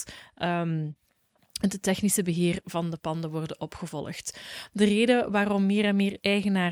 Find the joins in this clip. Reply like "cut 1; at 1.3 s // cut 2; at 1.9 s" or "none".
none